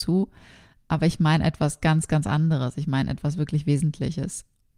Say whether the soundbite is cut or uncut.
uncut